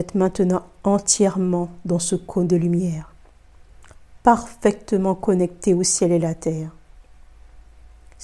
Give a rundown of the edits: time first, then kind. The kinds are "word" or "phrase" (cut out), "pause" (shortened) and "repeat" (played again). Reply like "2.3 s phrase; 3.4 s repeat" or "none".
none

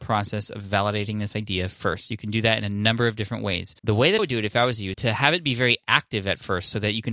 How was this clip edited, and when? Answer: 3.8 s pause; 4.2 s word; 4.9 s word

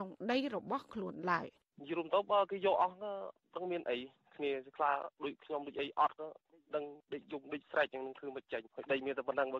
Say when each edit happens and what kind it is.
1.6 s pause

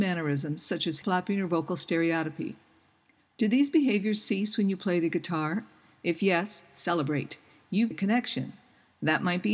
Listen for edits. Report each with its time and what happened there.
1.0 s word; 7.9 s word

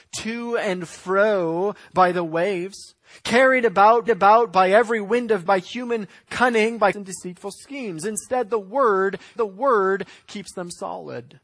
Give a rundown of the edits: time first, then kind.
4.1 s repeat; 5.5 s word; 6.9 s word; 9.4 s repeat

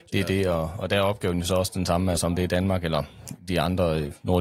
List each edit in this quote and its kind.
none

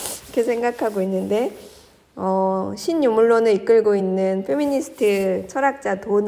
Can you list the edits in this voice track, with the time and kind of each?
none

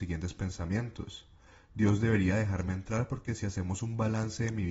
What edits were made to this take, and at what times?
none

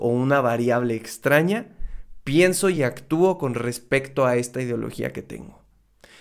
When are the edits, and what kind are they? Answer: none

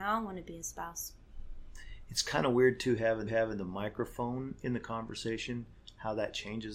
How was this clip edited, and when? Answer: 3.3 s repeat

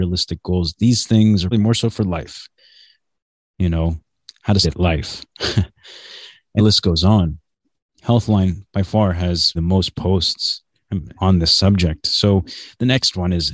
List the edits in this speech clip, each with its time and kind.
1.5 s word; 4.6 s word; 6.6 s word; 9.5 s word; 11.2 s word

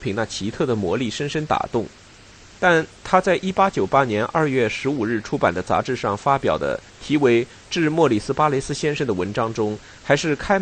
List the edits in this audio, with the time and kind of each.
6.9 s pause

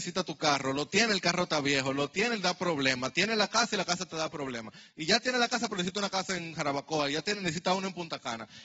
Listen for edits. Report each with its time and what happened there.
none

